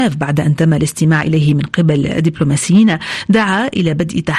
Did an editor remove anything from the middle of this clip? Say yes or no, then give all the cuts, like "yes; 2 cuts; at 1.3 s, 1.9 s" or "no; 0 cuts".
no; 0 cuts